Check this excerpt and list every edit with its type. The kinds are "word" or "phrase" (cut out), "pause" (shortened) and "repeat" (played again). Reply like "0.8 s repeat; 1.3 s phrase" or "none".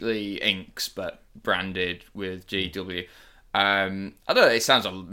none